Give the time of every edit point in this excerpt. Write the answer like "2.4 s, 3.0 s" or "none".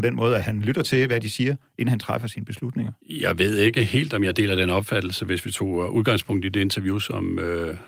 3.0 s

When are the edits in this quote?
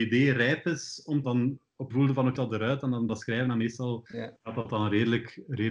1.2 s, 1.9 s, 2.4 s, 3.1 s, 4.4 s

